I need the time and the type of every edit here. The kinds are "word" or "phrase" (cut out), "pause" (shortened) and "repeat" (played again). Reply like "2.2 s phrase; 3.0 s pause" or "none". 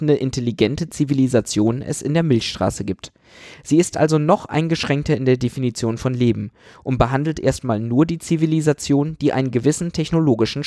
none